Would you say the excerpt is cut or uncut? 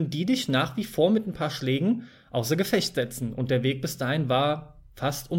uncut